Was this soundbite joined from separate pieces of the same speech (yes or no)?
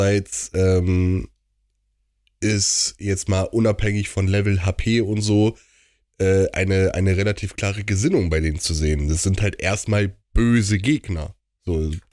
no